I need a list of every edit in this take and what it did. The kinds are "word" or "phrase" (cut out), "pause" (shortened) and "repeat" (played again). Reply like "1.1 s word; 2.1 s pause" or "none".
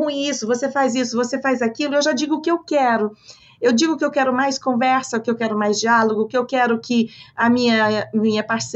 none